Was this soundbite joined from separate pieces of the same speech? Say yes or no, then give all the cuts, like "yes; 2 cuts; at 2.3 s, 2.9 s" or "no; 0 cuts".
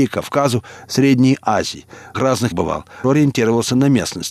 yes; 3 cuts; at 2.1 s, 2.5 s, 3.0 s